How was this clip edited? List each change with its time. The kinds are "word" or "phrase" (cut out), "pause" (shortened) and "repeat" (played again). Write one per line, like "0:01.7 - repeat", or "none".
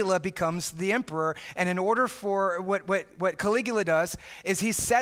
none